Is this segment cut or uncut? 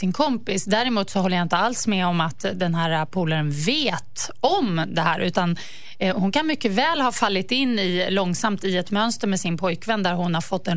uncut